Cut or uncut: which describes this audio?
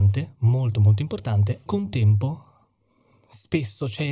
cut